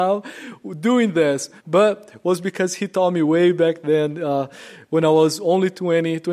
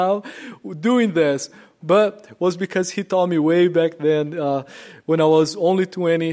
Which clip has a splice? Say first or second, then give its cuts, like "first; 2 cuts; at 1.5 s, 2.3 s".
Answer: first; 1 cut; at 1.6 s